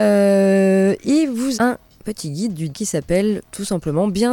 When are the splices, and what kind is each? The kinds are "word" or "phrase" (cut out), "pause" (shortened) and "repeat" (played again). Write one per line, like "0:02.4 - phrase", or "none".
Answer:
0:01.5 - word
0:02.7 - word